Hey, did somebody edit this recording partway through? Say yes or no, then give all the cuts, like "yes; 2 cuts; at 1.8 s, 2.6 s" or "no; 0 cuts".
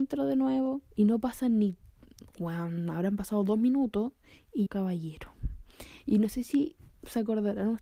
yes; 2 cuts; at 0.9 s, 4.7 s